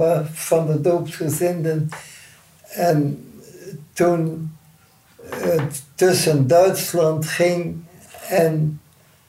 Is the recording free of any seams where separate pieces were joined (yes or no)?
yes